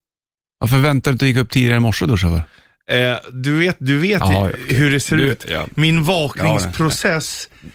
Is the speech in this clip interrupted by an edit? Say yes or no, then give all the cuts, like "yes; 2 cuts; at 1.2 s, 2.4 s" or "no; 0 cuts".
no; 0 cuts